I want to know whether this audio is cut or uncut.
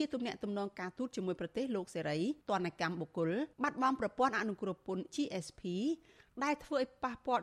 cut